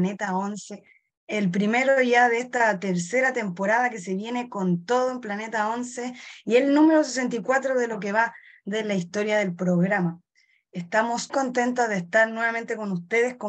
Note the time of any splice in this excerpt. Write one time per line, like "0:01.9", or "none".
0:11.3